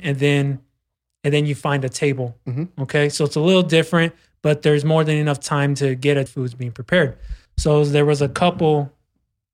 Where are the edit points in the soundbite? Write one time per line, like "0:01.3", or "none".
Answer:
0:06.3
0:07.5